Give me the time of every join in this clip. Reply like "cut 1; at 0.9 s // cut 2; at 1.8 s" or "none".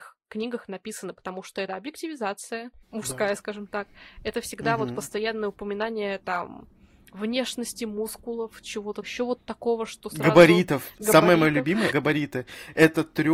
cut 1; at 1.7 s // cut 2; at 2.8 s // cut 3; at 9.0 s // cut 4; at 11.9 s